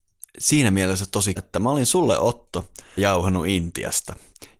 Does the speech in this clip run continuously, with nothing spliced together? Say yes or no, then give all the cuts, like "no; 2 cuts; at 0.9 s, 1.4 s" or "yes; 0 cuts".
no; 2 cuts; at 1.4 s, 3.0 s